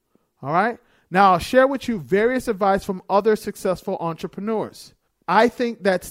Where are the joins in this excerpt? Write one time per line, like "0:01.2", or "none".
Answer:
0:05.1